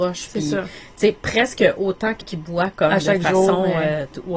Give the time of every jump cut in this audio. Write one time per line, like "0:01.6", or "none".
0:02.2